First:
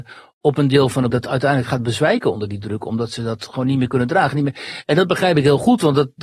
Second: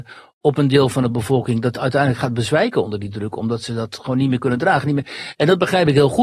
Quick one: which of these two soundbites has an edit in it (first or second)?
first